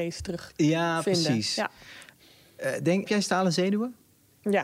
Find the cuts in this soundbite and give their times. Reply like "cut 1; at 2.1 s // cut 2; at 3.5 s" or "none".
cut 1; at 3.1 s

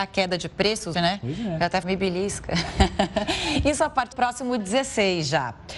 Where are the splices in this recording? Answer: cut 1; at 0.9 s // cut 2; at 1.8 s // cut 3; at 4.1 s // cut 4; at 4.6 s

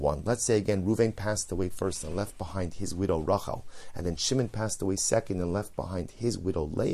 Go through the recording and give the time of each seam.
none

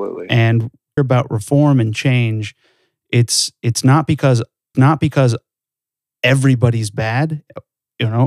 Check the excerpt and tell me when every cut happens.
cut 1; at 1.0 s // cut 2; at 4.7 s

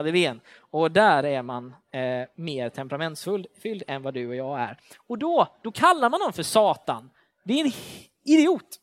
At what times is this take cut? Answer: none

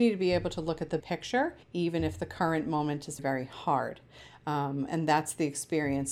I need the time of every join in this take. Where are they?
cut 1; at 1.0 s // cut 2; at 1.6 s // cut 3; at 3.2 s // cut 4; at 4.9 s

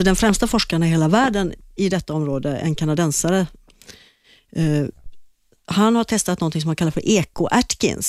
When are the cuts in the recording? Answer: none

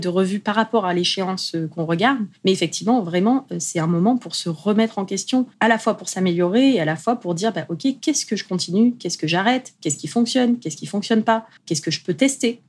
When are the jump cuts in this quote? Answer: cut 1; at 2.4 s // cut 2; at 5.5 s // cut 3; at 11.6 s

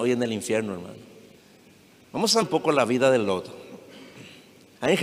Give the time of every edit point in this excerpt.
cut 1; at 1.4 s // cut 2; at 2.4 s

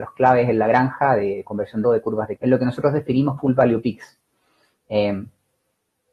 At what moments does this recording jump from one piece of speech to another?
cut 1; at 1.8 s // cut 2; at 2.4 s // cut 3; at 3.4 s

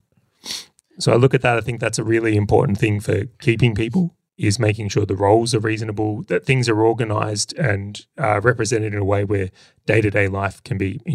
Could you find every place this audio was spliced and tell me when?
none

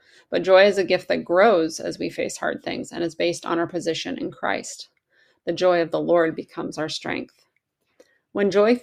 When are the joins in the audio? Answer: none

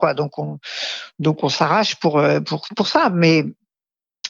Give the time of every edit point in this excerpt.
none

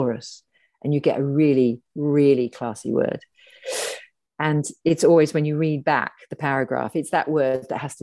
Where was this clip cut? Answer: none

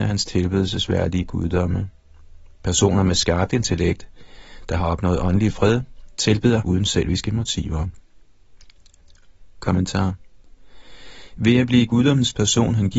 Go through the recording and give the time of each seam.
cut 1; at 6.6 s

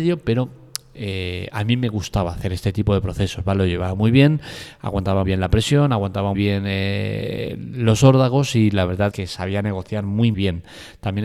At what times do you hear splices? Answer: cut 1; at 5.2 s // cut 2; at 6.3 s // cut 3; at 9.1 s // cut 4; at 10.3 s

